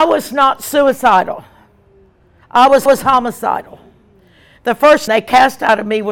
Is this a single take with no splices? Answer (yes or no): no